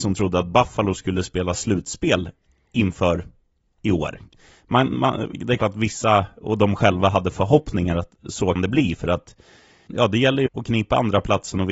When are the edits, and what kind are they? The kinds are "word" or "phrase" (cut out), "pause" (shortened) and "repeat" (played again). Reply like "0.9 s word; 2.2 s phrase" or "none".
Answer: 5.6 s word; 8.6 s word; 9.9 s word; 10.5 s word